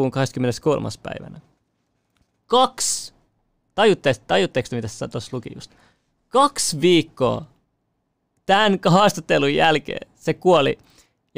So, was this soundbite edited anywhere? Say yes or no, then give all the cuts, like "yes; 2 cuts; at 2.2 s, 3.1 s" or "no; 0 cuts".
no; 0 cuts